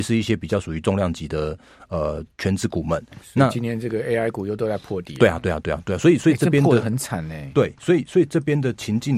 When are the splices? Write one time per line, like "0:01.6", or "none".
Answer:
none